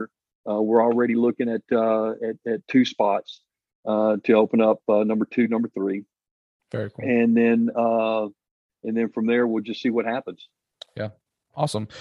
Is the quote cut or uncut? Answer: uncut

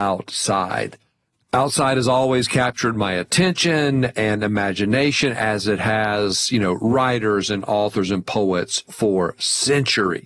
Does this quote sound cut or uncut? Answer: uncut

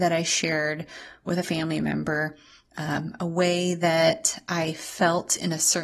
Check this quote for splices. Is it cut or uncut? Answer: uncut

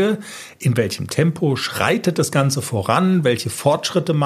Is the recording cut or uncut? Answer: uncut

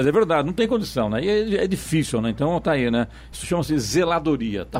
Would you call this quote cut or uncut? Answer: uncut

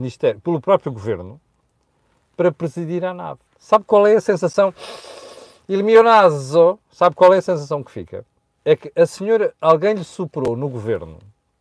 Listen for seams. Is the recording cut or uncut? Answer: cut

